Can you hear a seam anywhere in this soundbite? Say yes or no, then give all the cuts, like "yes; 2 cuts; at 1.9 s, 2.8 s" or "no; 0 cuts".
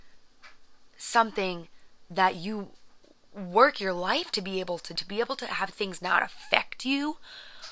yes; 1 cut; at 5.0 s